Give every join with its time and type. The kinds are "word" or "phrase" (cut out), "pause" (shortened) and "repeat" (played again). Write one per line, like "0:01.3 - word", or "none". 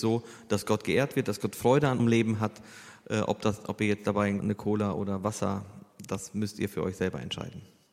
0:02.0 - word
0:04.4 - phrase